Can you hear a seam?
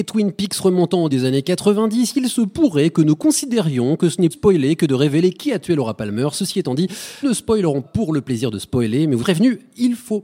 yes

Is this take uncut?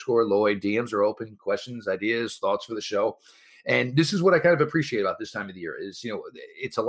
yes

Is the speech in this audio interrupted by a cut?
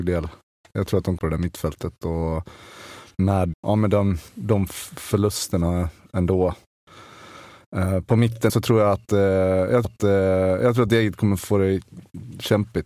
yes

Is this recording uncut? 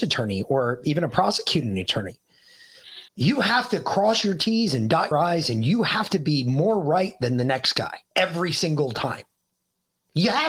no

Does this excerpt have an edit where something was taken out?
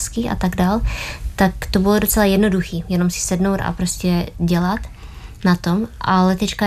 no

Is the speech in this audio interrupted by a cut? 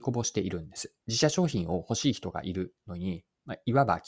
yes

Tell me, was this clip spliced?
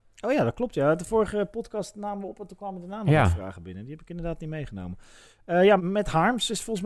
yes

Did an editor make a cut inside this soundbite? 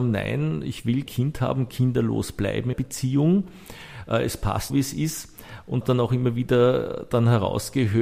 yes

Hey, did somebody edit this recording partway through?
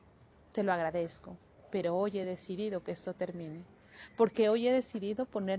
no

